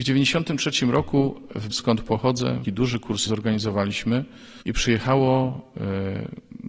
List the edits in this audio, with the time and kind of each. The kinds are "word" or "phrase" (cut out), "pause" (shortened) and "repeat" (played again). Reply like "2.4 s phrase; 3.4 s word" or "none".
1.7 s word; 2.6 s phrase; 3.3 s phrase; 4.6 s pause